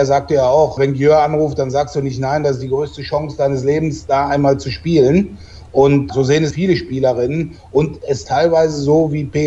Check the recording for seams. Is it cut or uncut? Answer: cut